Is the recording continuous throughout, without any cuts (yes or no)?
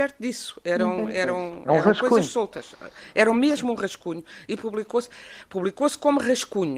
yes